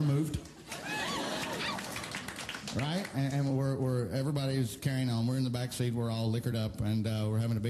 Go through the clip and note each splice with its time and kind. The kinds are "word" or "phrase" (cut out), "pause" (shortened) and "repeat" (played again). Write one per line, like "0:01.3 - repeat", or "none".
none